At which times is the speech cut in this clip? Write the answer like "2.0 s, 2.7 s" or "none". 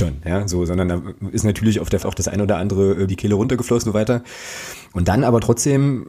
2.0 s, 3.1 s, 3.8 s